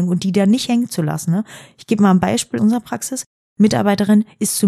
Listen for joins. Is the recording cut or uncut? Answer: cut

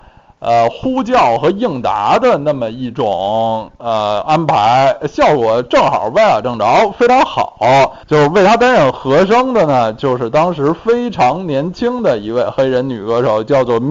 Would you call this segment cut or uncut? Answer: cut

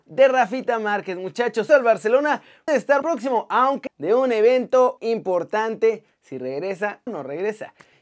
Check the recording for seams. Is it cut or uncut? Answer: cut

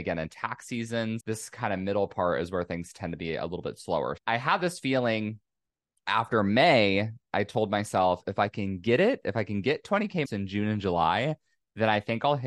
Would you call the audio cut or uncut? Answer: cut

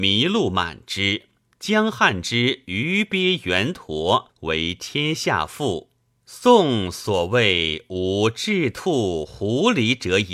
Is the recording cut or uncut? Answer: cut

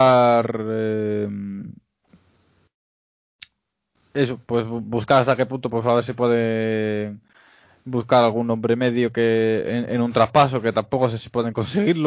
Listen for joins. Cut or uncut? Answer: uncut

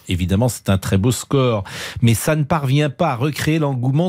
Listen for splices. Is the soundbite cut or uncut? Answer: uncut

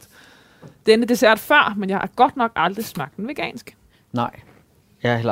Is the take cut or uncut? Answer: uncut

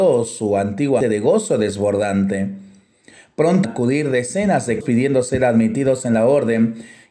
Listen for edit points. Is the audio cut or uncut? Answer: cut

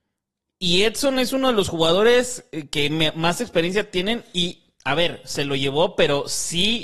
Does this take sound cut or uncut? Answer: uncut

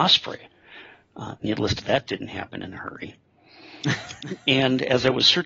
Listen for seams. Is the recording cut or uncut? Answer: cut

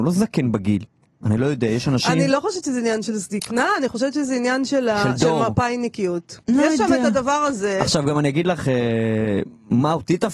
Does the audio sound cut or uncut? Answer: uncut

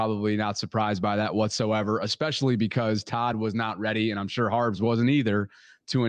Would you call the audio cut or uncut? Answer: uncut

